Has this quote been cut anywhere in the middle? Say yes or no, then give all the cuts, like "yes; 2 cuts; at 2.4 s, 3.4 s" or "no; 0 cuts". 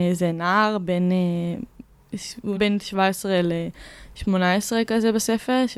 yes; 1 cut; at 2.6 s